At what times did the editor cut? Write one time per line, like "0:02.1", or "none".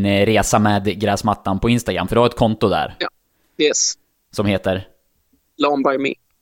0:01.6

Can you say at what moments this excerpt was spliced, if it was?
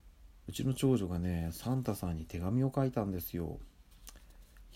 none

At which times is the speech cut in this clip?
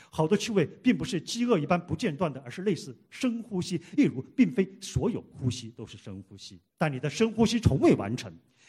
0:06.7

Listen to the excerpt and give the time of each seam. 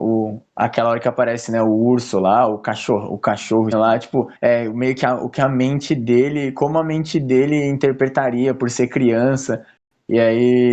0:03.7
0:04.4

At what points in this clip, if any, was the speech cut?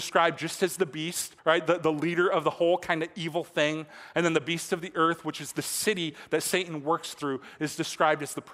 0:01.4

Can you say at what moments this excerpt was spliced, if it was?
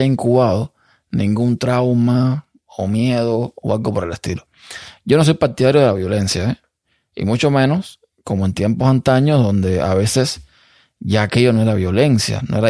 none

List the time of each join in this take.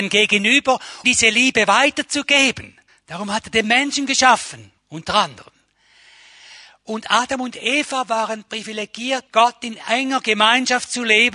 0:01.0
0:02.9
0:04.8
0:09.3

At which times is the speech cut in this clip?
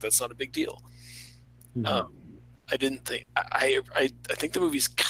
0:03.2

